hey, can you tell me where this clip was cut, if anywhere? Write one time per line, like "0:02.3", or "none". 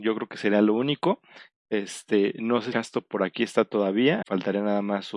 0:02.7
0:04.2